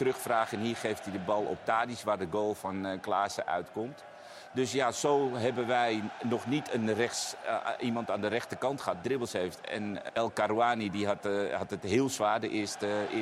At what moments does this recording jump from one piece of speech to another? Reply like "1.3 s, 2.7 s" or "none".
9.0 s, 10.1 s

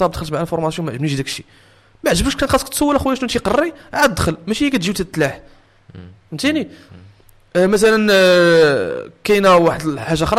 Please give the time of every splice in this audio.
none

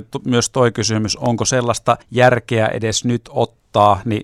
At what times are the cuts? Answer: 2.0 s

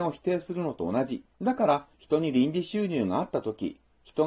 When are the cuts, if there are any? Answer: 1.3 s, 1.9 s

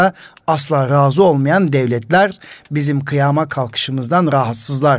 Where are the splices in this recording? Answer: none

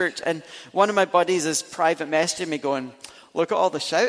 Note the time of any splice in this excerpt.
none

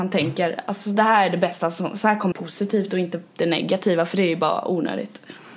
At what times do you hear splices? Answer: 2.3 s

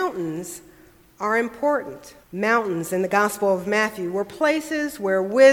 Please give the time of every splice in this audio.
2.2 s

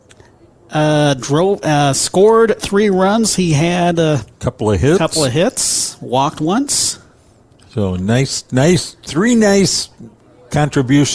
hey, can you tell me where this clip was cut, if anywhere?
none

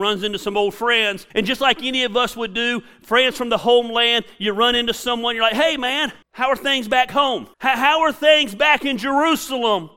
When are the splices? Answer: 1.3 s, 6.2 s, 7.5 s

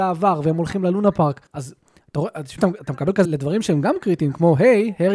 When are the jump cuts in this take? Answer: 1.5 s, 2.6 s, 3.2 s

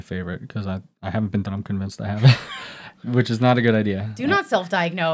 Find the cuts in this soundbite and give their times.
1.4 s

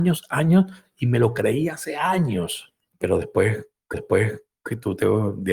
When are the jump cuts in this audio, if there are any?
2.9 s, 3.9 s

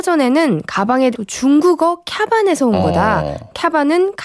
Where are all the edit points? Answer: 1.1 s

